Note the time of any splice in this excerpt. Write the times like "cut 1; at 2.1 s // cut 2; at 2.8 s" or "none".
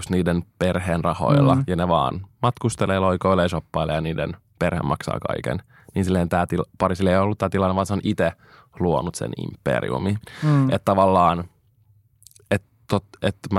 none

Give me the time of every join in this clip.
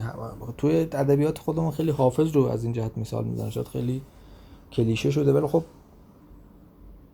none

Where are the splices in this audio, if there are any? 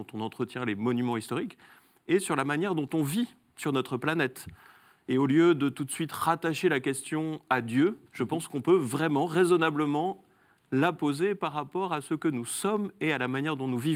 cut 1; at 8.1 s

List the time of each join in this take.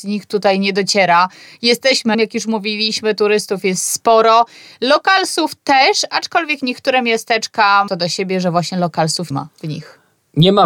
cut 1; at 2.1 s // cut 2; at 7.9 s // cut 3; at 9.3 s

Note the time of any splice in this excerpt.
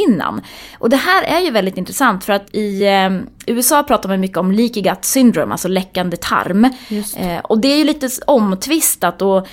none

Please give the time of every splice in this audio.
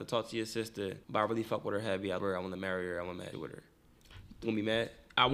cut 1; at 1.0 s // cut 2; at 2.2 s // cut 3; at 3.3 s // cut 4; at 4.4 s

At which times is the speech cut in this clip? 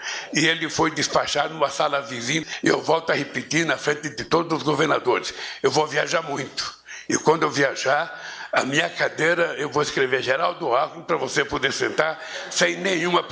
none

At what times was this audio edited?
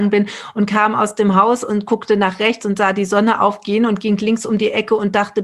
none

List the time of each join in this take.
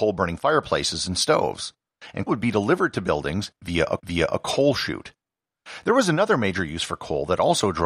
cut 1; at 2.3 s // cut 2; at 4.0 s

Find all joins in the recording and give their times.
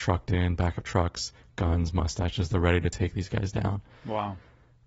none

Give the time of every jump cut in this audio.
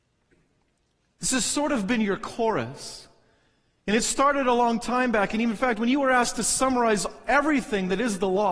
none

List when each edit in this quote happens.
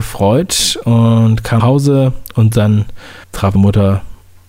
cut 1; at 1.6 s // cut 2; at 3.2 s // cut 3; at 3.5 s

